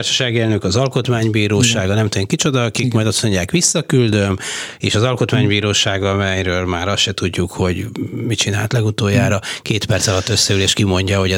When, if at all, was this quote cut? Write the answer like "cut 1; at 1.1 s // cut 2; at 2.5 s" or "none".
none